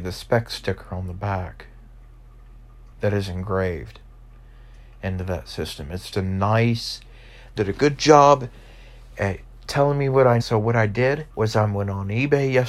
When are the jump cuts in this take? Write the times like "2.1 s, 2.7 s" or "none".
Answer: 2.9 s, 6.1 s, 7.6 s, 10.4 s, 11.3 s